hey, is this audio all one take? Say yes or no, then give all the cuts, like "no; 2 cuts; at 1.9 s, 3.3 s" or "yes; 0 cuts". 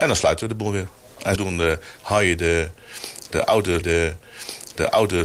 no; 2 cuts; at 1.4 s, 3.8 s